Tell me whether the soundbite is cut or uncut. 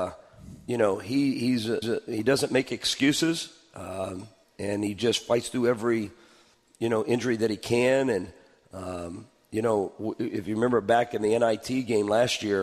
cut